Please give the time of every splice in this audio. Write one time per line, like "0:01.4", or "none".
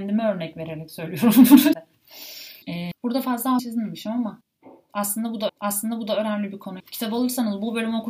0:01.7
0:02.6
0:03.6
0:05.5
0:06.8